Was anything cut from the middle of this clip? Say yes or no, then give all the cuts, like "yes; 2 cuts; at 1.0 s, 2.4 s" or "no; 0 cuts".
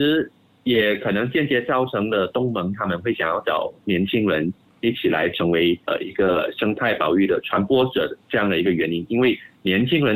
yes; 1 cut; at 5.8 s